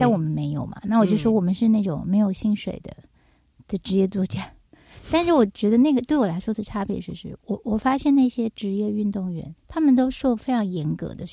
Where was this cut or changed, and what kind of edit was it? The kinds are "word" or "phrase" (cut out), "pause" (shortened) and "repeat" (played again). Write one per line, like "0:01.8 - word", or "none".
0:09.6 - pause